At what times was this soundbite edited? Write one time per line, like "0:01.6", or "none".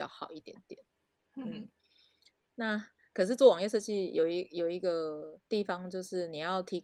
0:05.5